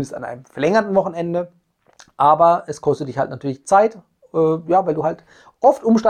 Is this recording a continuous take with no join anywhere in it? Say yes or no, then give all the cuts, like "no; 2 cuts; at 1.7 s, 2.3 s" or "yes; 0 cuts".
yes; 0 cuts